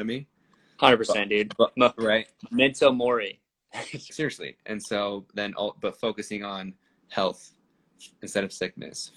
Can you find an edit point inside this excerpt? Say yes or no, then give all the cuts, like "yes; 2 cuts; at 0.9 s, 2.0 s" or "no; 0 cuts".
yes; 1 cut; at 4.1 s